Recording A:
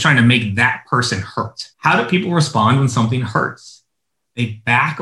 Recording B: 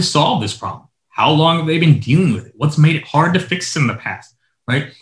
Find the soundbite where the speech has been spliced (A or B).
A